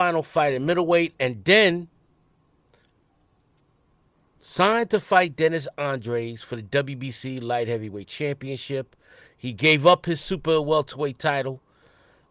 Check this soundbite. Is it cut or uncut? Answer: uncut